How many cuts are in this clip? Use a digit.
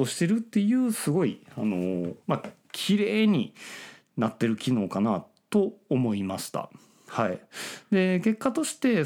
1